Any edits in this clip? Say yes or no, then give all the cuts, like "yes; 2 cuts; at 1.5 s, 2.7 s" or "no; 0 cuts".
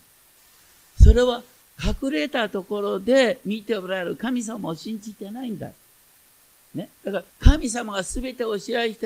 yes; 2 cuts; at 6.9 s, 7.3 s